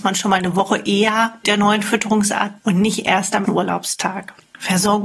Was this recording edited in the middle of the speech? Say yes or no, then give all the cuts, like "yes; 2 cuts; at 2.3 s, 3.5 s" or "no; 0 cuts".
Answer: yes; 3 cuts; at 1.4 s, 2.6 s, 3.4 s